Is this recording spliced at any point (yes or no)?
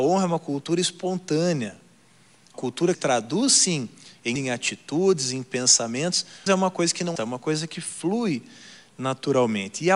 yes